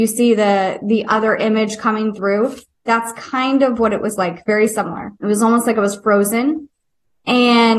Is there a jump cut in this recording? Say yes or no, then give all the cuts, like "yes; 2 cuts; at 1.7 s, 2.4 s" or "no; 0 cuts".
yes; 1 cut; at 5.2 s